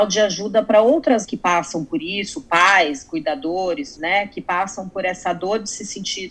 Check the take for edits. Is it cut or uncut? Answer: cut